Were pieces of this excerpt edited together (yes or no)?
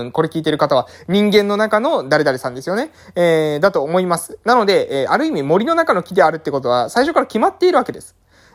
no